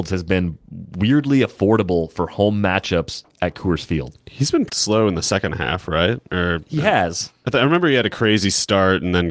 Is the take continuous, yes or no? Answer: no